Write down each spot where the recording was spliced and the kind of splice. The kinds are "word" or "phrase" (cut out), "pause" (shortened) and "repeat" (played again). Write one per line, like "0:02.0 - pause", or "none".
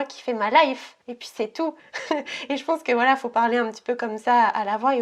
0:01.0 - pause
0:01.8 - pause